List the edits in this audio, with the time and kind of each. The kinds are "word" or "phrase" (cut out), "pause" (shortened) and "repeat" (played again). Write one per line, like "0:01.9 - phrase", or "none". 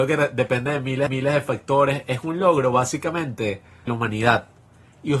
0:01.1 - repeat
0:03.9 - word